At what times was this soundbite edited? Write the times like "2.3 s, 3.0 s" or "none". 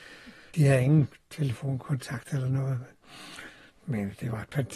none